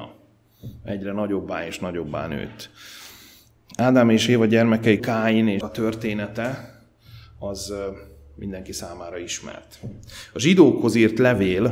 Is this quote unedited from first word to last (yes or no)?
no